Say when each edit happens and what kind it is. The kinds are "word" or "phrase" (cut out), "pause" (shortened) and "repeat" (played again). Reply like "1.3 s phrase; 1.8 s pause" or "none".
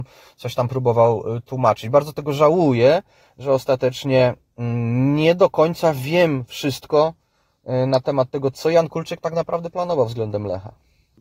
none